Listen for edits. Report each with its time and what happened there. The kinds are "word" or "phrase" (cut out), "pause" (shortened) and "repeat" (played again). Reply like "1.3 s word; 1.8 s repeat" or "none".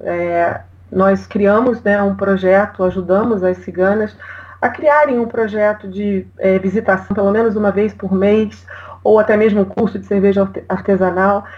6.3 s pause